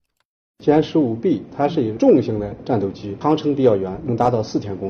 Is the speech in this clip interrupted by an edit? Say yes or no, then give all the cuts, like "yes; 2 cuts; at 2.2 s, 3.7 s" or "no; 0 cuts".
no; 0 cuts